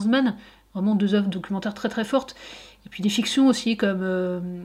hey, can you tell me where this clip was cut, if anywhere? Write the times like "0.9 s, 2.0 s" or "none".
none